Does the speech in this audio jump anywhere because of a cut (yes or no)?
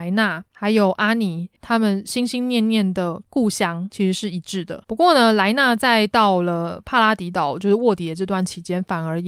yes